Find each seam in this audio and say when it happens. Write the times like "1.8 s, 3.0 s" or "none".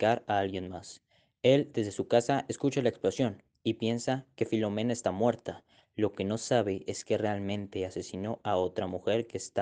none